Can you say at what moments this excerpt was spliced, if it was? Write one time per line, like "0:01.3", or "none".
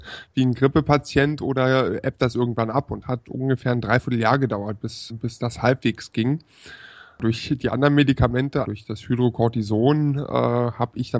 0:03.0
0:05.1
0:08.6